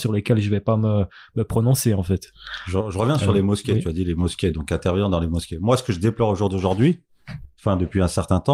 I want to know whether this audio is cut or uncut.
uncut